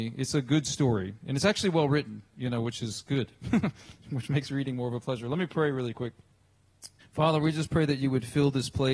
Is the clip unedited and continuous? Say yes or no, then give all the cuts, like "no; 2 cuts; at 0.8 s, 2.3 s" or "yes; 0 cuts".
no; 1 cut; at 7.0 s